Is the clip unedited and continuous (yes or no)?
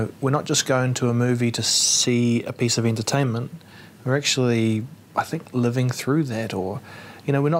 yes